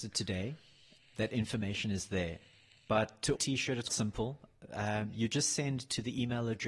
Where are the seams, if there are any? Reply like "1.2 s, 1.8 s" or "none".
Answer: 1.0 s, 3.4 s, 3.9 s